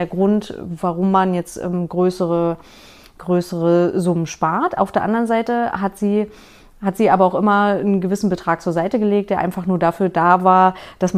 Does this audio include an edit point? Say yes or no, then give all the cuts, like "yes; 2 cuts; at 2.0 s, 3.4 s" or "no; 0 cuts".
no; 0 cuts